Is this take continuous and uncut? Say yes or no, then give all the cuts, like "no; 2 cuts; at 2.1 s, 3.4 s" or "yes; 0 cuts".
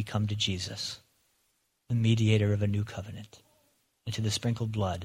yes; 0 cuts